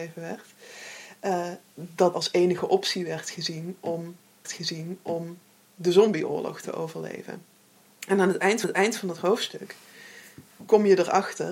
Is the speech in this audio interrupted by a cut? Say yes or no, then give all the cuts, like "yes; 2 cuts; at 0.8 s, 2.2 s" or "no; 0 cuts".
yes; 3 cuts; at 2.1 s, 4.4 s, 8.6 s